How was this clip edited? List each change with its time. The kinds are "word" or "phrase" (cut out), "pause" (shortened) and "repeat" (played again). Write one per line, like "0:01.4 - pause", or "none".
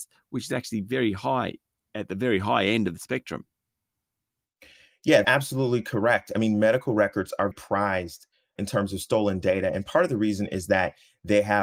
0:05.2 - word
0:07.5 - word